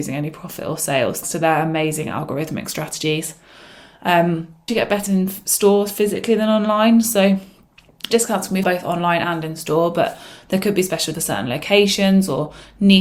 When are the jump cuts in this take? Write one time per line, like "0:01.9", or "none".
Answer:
0:01.2
0:04.7
0:05.1
0:08.1
0:08.6
0:11.1

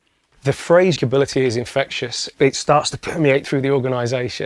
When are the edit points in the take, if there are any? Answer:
0:01.0

